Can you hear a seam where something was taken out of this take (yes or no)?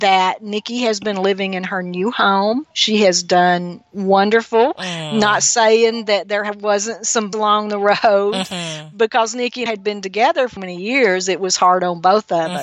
yes